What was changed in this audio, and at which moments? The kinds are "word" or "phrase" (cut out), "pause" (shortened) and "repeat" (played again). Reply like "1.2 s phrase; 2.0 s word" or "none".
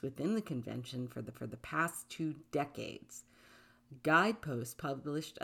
1.3 s repeat

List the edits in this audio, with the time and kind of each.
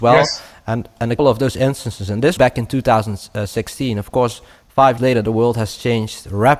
1.2 s word; 2.4 s word; 5.0 s word

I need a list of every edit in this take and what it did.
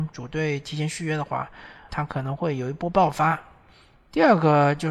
1.9 s word

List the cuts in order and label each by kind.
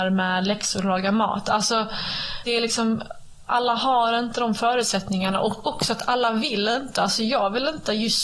2.5 s word

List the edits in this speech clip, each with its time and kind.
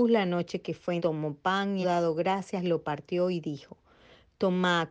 1.0 s word; 1.8 s word

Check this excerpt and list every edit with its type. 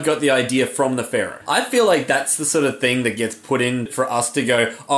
none

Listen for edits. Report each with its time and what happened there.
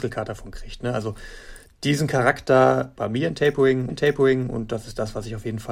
2.9 s word; 3.9 s repeat

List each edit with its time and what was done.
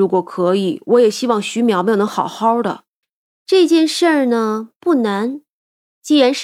3.0 s pause

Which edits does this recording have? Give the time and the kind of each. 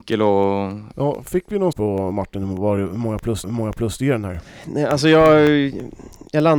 0.9 s word; 1.7 s word; 3.4 s repeat

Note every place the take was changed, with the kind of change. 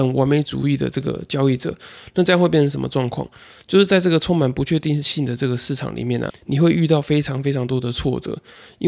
6.3 s word

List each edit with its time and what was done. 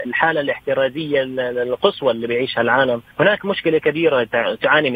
3.1 s pause

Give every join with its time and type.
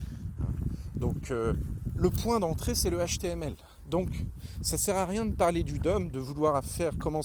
none

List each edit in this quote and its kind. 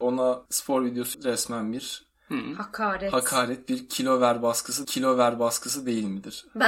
1.1 s word; 4.8 s repeat

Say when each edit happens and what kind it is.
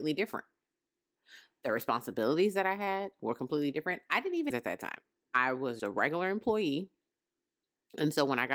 4.5 s phrase; 5.2 s pause; 5.8 s word

